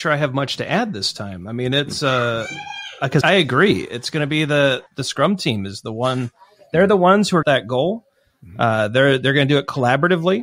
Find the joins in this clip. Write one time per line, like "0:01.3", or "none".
0:03.2
0:04.9
0:07.4